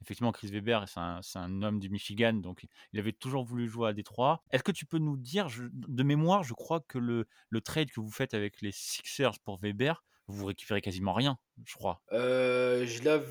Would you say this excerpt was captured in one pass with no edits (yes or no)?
no